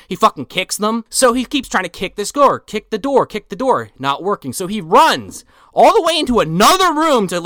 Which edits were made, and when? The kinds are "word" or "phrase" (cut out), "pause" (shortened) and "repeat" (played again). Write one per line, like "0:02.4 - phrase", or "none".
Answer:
none

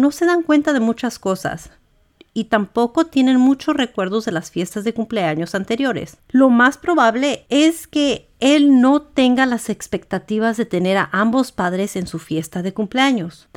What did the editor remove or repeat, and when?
none

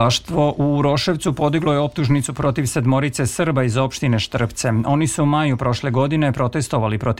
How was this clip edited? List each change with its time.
none

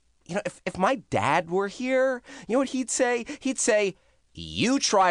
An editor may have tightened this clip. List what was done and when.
none

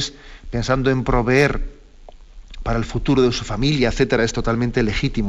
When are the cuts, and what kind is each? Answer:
none

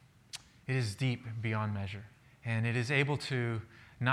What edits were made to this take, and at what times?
0:02.2 - pause

